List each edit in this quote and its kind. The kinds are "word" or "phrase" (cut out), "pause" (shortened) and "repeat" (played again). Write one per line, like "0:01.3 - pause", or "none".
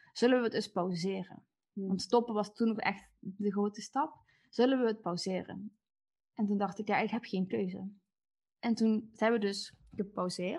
none